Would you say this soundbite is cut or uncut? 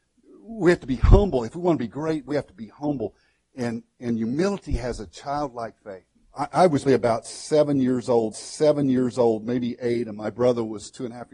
cut